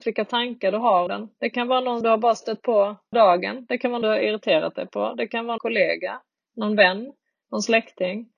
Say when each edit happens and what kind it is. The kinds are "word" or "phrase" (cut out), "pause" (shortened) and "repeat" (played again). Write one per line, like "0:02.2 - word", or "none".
0:01.1 - word
0:02.0 - word
0:03.1 - word
0:04.0 - word
0:05.6 - word